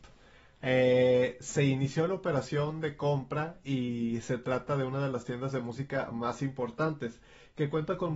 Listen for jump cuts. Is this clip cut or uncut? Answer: uncut